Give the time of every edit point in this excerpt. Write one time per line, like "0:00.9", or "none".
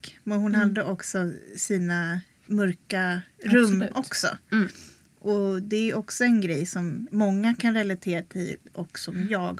0:08.7